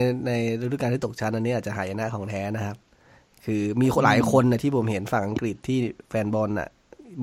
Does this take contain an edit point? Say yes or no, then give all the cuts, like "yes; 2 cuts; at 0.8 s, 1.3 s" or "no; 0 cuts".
no; 0 cuts